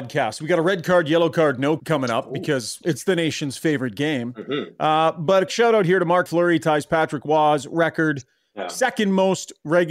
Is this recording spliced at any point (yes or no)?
yes